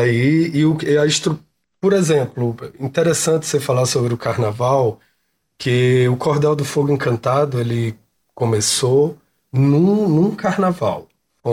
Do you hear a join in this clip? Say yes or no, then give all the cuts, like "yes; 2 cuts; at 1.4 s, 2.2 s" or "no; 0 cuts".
no; 0 cuts